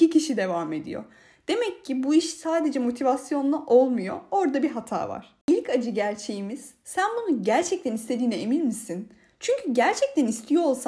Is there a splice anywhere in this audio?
no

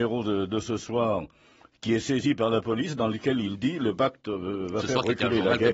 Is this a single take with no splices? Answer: yes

